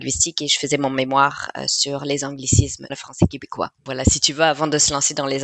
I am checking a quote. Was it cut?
yes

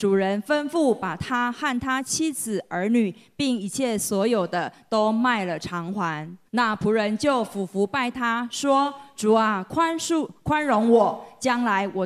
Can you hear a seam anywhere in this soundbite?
yes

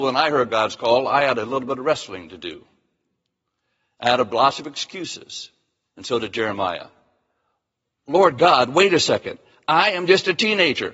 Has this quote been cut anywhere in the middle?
no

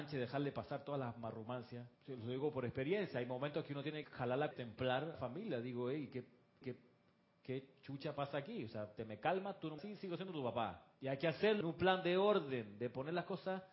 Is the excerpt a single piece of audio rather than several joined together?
no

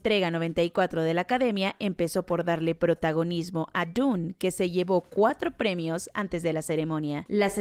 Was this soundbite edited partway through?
no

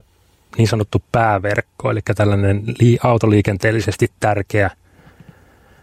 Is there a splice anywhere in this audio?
no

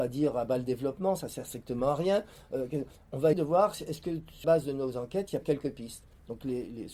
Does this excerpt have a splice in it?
yes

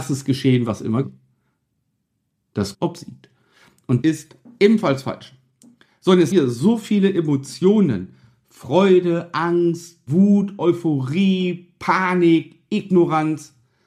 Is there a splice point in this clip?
yes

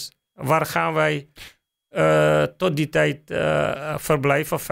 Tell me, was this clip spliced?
no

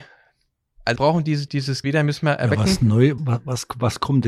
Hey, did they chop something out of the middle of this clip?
yes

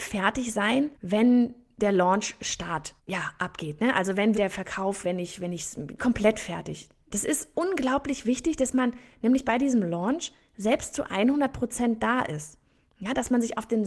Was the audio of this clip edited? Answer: yes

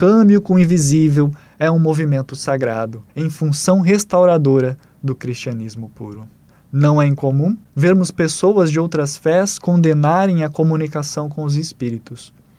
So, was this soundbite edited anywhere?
yes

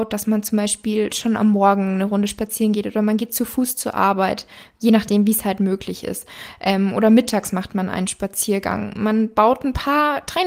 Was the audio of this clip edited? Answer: no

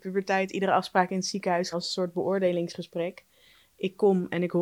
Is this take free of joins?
no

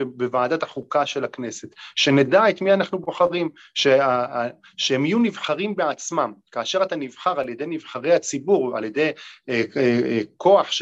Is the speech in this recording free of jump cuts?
yes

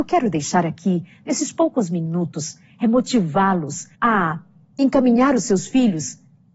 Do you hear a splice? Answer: yes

